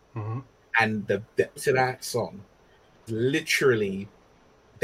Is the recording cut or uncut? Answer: cut